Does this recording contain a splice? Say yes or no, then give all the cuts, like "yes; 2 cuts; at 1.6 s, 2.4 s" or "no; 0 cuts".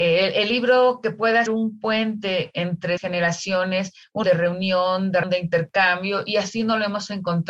yes; 4 cuts; at 1.5 s, 3.0 s, 4.2 s, 5.2 s